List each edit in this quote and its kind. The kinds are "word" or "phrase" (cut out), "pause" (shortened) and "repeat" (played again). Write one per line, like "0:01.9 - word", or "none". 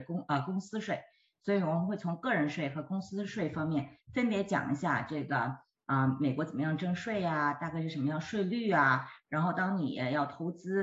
none